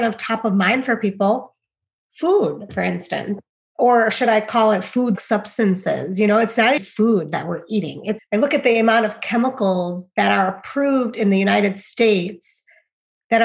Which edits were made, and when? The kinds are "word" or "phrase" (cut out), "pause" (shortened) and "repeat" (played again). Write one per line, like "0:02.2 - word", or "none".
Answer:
0:05.2 - word
0:06.8 - word
0:08.2 - word